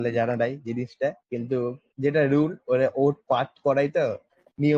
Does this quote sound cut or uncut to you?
cut